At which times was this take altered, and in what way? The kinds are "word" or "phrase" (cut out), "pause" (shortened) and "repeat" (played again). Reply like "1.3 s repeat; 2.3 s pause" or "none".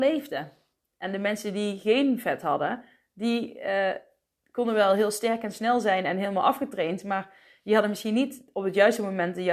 none